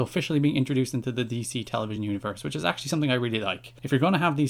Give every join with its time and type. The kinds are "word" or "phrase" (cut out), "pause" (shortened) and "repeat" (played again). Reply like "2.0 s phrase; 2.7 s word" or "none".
none